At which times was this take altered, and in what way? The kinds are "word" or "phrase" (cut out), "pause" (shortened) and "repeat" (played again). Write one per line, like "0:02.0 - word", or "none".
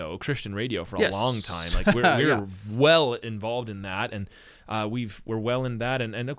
none

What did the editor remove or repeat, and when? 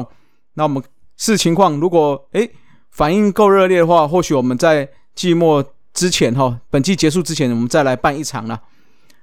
0:06.6 - pause

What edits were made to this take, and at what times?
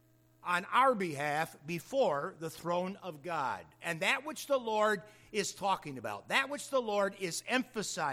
none

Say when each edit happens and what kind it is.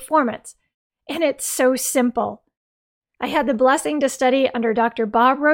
none

